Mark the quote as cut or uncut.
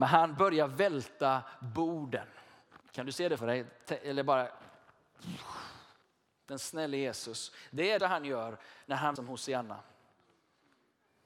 cut